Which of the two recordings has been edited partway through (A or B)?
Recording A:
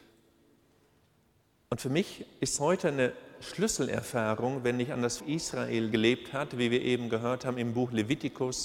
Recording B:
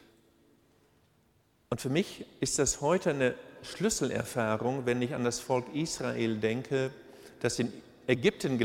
A